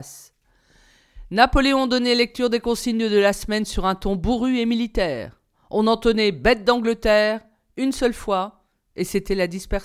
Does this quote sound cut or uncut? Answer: uncut